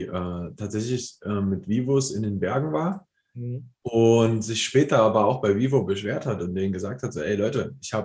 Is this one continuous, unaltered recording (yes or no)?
yes